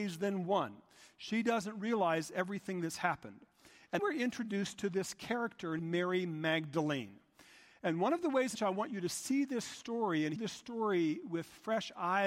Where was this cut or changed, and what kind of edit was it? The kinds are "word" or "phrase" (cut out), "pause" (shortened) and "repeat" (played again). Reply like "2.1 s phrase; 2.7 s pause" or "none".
4.0 s word; 5.8 s word; 8.5 s word; 10.4 s word